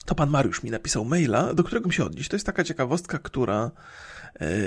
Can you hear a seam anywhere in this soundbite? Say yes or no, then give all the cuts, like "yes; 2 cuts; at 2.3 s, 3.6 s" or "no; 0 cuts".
yes; 1 cut; at 1.8 s